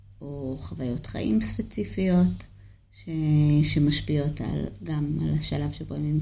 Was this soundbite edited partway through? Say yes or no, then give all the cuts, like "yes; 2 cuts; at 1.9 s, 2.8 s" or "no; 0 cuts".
no; 0 cuts